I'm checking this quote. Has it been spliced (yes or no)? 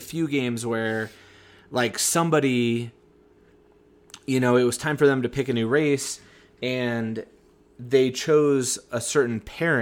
no